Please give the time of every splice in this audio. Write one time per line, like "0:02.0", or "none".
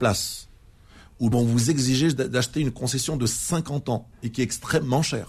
0:01.3